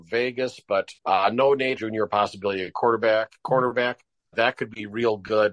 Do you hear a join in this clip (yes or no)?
yes